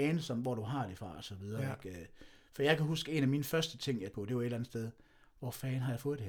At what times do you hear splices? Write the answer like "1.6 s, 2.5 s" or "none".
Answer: 4.1 s